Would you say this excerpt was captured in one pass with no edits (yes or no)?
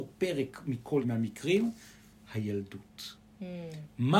no